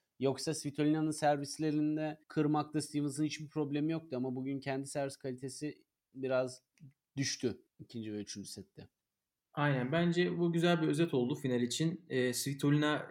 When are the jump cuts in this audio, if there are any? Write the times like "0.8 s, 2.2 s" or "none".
2.2 s, 7.7 s